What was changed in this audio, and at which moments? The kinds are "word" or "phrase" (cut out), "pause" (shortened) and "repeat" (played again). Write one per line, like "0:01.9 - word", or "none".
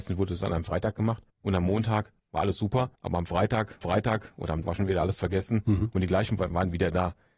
0:01.3 - pause
0:02.2 - pause
0:03.0 - pause
0:03.8 - repeat
0:04.6 - word
0:06.4 - word